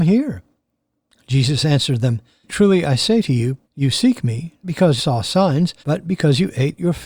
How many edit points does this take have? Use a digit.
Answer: 5